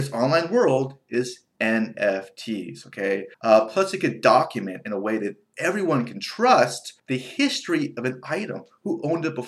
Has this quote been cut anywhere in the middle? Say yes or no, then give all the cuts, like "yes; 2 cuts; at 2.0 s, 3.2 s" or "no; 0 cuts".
yes; 2 cuts; at 3.3 s, 7.0 s